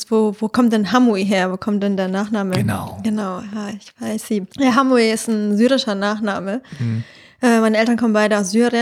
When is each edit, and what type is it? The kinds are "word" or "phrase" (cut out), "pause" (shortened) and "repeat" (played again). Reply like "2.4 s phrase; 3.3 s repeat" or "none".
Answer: 4.5 s pause